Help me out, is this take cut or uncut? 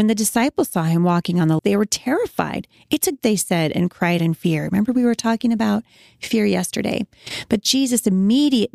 cut